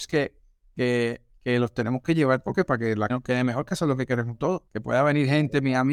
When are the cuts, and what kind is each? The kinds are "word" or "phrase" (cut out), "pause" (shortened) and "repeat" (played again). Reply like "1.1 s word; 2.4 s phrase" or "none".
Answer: 3.1 s word; 4.7 s pause